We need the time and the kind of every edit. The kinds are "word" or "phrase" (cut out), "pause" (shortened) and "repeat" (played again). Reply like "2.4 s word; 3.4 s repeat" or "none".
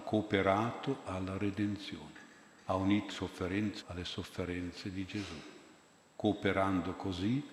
3.1 s word; 3.8 s phrase